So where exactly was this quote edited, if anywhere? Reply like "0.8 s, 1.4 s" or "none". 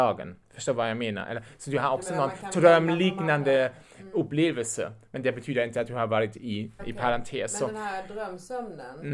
6.8 s